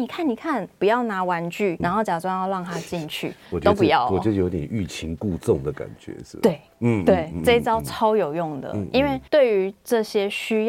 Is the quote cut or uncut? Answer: cut